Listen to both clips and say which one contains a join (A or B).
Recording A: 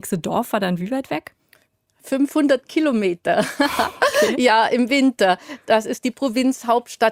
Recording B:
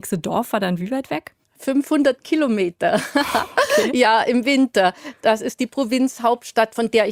B